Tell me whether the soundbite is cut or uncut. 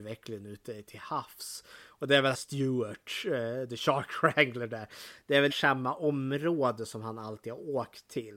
cut